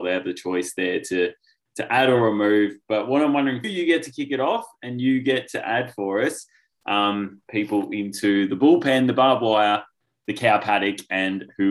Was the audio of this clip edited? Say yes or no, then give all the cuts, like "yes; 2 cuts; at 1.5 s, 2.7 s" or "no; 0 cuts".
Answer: yes; 1 cut; at 3.6 s